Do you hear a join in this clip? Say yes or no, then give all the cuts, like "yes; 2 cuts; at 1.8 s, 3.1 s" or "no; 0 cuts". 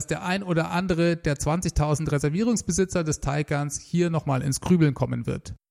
no; 0 cuts